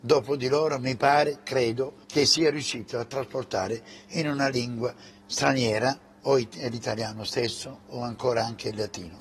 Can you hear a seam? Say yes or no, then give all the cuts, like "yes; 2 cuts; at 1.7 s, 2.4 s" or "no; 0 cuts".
yes; 2 cuts; at 2.0 s, 5.1 s